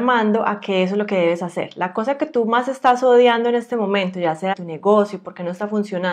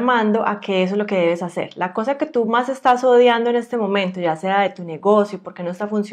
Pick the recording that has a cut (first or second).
first